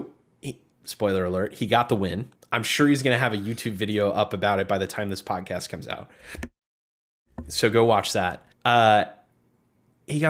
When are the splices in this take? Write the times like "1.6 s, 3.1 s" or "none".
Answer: 2.4 s, 8.5 s